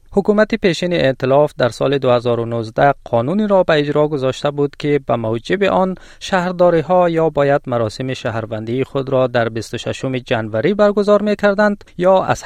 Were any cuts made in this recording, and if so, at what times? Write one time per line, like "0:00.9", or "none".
none